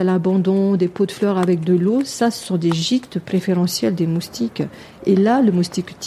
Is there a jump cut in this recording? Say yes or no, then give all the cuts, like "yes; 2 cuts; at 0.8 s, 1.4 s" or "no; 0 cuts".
no; 0 cuts